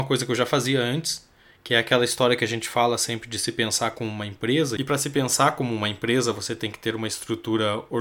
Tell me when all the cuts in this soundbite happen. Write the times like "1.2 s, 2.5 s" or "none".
none